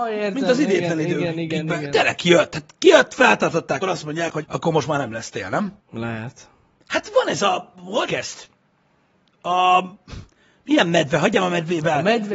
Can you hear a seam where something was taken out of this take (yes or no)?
yes